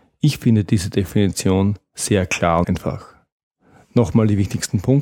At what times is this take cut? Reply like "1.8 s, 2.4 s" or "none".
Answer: 2.6 s